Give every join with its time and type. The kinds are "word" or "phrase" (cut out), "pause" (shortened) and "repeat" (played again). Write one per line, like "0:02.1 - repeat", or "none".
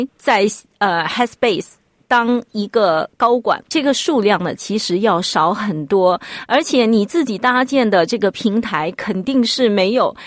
none